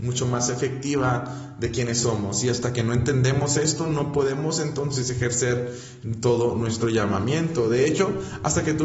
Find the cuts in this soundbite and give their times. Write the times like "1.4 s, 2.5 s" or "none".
none